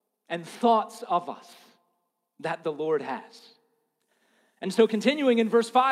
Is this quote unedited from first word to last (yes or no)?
yes